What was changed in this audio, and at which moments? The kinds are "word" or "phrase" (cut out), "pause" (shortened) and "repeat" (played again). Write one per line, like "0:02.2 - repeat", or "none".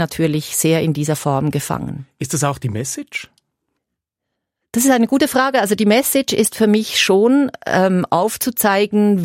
none

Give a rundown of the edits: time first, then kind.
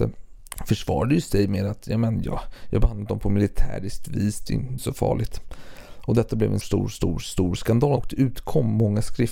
0:04.8 - word
0:06.6 - word
0:07.2 - word

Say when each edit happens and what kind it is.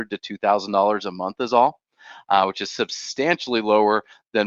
none

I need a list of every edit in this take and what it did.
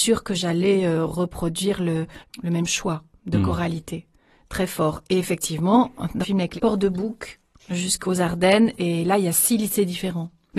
0:02.2 - pause
0:06.2 - word
0:06.6 - phrase

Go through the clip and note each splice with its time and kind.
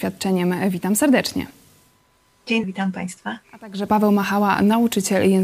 0:02.6 - word
0:03.4 - pause
0:03.9 - word

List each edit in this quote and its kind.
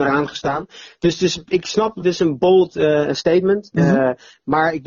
none

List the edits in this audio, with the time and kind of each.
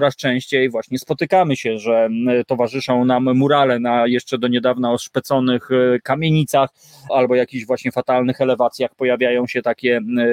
0:07.1 - word

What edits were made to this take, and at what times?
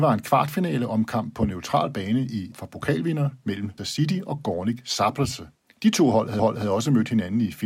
0:02.5 - word
0:03.8 - word
0:05.5 - pause
0:06.4 - repeat

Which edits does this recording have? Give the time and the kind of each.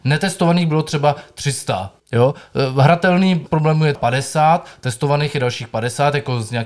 0:02.0 - pause
0:03.5 - word
0:03.9 - word

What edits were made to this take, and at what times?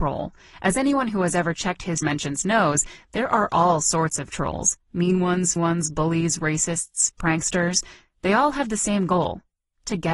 0:02.0 - word
0:05.6 - word

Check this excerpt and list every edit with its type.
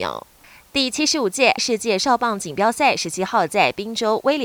0:01.6 - word

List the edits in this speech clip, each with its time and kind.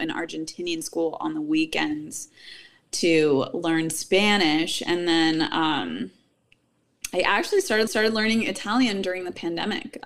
0:07.9 - repeat

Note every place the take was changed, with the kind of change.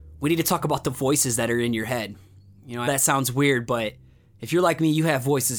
0:02.9 - word

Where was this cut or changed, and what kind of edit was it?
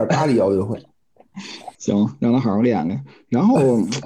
0:01.7 - pause

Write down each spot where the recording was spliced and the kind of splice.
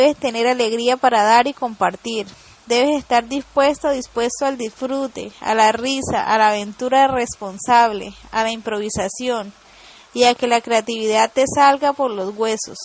none

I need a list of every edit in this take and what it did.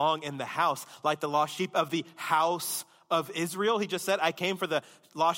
none

